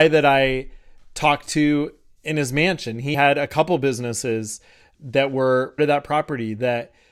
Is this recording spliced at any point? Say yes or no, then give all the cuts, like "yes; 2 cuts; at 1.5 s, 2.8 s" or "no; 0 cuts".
yes; 3 cuts; at 3.1 s, 4.9 s, 5.8 s